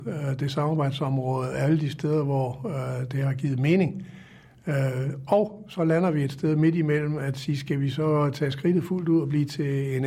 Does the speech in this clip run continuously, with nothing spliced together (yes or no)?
yes